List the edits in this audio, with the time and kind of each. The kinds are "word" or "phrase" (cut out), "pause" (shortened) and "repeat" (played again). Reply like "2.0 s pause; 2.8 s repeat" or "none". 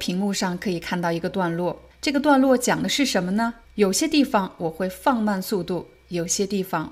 1.9 s pause; 3.6 s pause